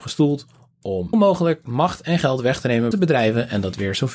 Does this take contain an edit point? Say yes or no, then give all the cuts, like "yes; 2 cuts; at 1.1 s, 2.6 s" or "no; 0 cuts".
yes; 2 cuts; at 1.1 s, 2.9 s